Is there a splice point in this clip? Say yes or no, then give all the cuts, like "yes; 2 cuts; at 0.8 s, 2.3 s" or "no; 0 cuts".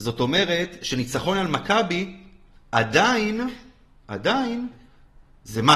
no; 0 cuts